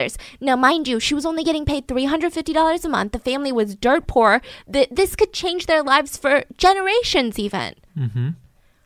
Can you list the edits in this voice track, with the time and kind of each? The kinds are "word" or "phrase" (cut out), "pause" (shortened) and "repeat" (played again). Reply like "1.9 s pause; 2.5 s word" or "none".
none